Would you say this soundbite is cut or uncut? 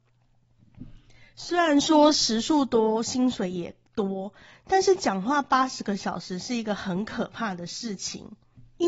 uncut